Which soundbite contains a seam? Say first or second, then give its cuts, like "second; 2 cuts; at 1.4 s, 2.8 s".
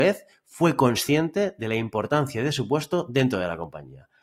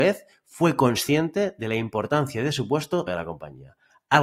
second; 1 cut; at 3.1 s